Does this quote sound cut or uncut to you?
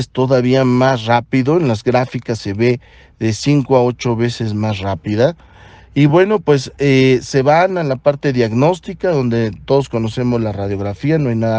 uncut